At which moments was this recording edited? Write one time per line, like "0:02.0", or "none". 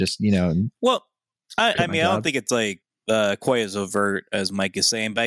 none